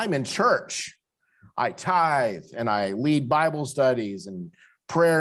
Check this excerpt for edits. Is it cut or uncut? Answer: uncut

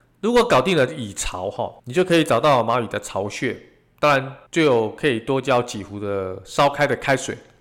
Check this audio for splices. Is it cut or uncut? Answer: cut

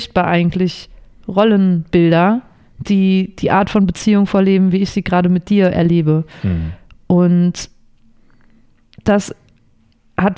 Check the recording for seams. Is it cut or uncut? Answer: uncut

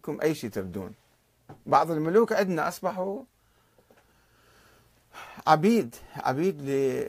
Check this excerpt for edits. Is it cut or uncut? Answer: uncut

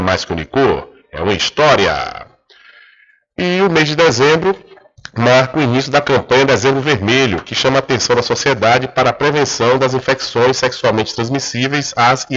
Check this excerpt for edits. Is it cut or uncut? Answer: uncut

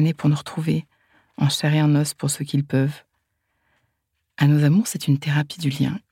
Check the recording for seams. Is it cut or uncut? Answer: uncut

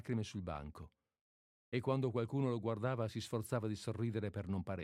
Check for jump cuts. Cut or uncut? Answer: uncut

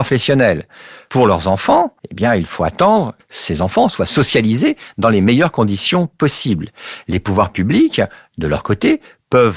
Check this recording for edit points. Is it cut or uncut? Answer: cut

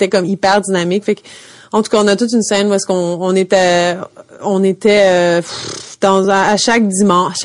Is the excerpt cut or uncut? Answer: uncut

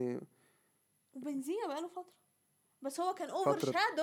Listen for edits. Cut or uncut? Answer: uncut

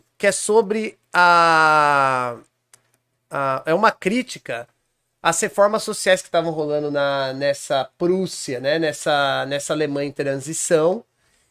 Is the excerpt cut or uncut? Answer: uncut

